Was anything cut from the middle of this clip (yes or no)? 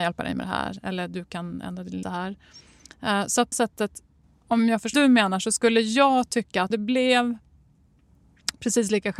yes